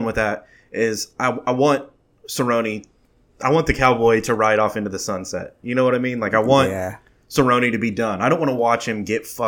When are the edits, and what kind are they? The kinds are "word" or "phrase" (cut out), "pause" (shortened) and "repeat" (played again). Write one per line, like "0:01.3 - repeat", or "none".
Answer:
none